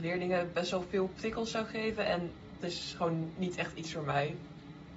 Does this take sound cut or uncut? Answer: cut